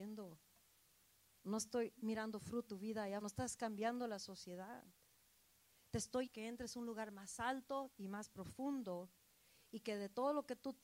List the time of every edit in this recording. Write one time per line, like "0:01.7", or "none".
0:02.7
0:03.2
0:06.3